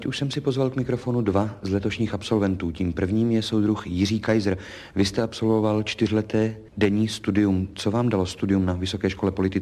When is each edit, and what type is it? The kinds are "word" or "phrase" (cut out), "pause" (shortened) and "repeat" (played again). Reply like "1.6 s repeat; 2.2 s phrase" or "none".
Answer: 6.7 s pause